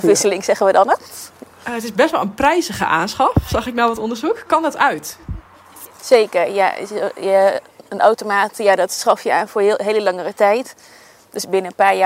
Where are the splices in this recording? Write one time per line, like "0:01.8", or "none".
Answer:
none